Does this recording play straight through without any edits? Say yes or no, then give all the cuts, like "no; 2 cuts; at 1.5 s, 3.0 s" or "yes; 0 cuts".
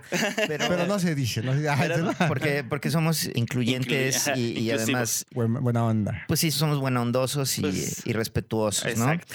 no; 4 cuts; at 2.0 s, 3.3 s, 5.3 s, 6.5 s